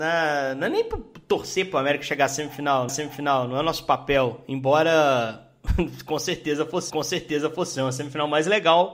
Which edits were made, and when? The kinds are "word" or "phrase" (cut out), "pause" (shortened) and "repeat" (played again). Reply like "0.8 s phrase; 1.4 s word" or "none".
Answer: 2.9 s repeat; 6.9 s repeat